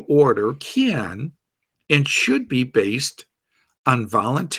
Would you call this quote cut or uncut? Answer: uncut